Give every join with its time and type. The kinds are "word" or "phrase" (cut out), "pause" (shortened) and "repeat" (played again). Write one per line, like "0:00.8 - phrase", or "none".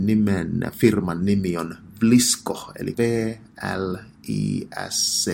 0:02.9 - word

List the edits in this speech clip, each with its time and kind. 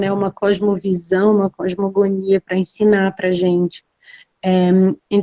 none

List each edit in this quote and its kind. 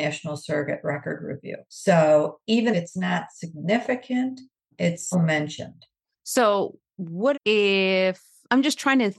0:01.6 - pause
0:02.7 - word
0:05.1 - word
0:07.3 - word

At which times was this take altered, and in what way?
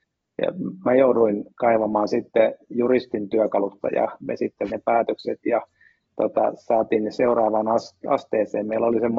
0:01.5 - pause
0:03.8 - word
0:04.2 - word
0:04.7 - word

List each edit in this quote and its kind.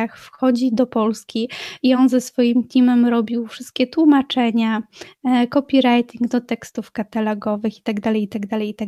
none

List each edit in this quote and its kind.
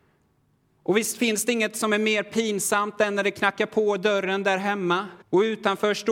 0:05.2 - pause

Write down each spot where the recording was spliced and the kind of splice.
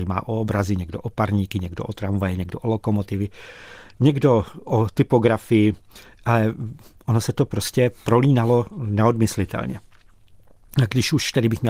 none

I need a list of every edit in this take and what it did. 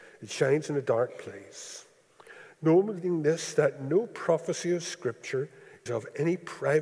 0:05.9 - word

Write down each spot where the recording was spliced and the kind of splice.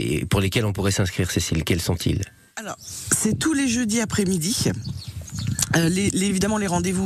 none

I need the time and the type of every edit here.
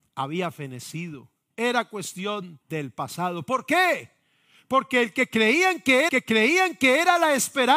0:02.6 - pause
0:06.1 - repeat

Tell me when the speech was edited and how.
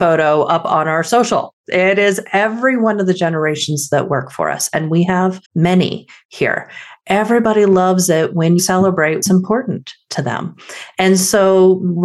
0:05.4 - pause
0:08.6 - word
0:09.2 - word

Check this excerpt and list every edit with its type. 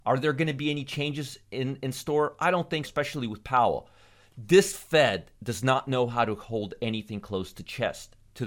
0:02.8 - word

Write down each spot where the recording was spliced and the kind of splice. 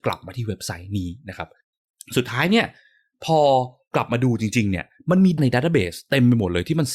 0:05.4 - word

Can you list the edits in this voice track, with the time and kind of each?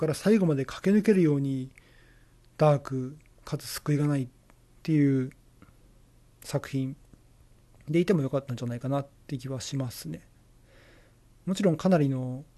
none

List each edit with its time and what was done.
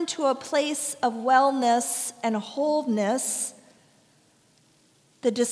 none

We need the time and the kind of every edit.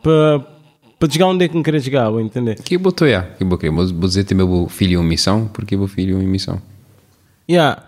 none

